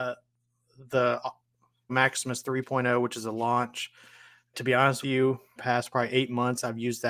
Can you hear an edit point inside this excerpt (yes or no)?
yes